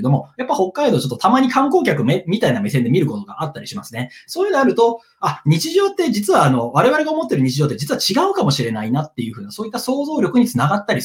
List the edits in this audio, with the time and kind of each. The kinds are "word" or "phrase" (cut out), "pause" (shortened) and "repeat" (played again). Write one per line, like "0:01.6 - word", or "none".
none

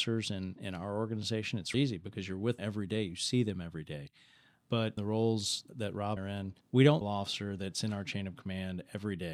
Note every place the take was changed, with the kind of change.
0:01.7 - word
0:02.6 - word
0:05.0 - phrase
0:05.7 - word
0:06.2 - phrase
0:06.6 - pause
0:07.0 - phrase

